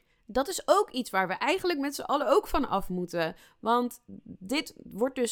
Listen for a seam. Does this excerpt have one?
no; 0 cuts

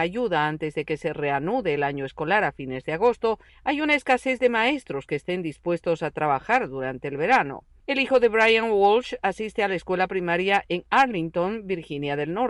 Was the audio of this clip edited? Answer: no; 0 cuts

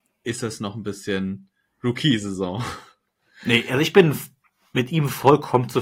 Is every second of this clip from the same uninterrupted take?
yes; 0 cuts

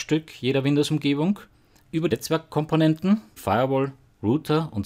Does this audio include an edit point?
yes; 3 cuts; at 1.5 s, 2.1 s, 3.4 s

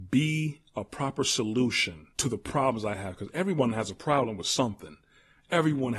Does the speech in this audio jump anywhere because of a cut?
yes; 1 cut; at 2.1 s

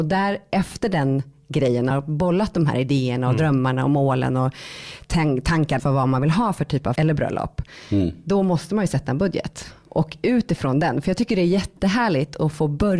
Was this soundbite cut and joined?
yes; 3 cuts; at 1.9 s, 5.8 s, 7.0 s

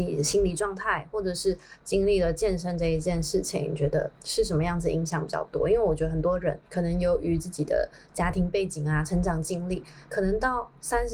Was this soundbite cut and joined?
yes; 2 cuts; at 4.1 s, 6.7 s

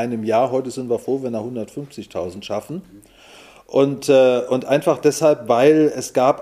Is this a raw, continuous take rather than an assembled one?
yes; 0 cuts

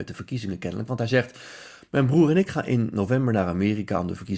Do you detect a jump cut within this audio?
no; 0 cuts

